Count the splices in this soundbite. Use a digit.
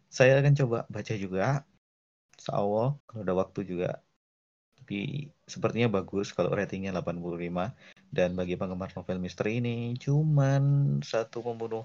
1